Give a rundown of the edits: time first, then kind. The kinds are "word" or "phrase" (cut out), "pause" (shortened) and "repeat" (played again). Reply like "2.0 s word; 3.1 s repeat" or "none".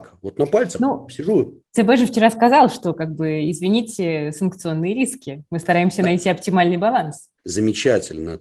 1.7 s pause; 7.4 s pause